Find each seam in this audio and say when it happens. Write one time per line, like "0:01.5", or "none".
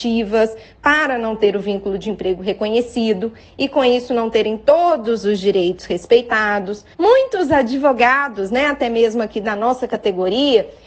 0:06.9